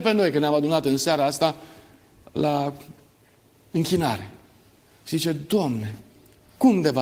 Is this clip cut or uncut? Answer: uncut